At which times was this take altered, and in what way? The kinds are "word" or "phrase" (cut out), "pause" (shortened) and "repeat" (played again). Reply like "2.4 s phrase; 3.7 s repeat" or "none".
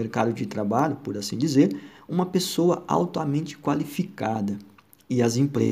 none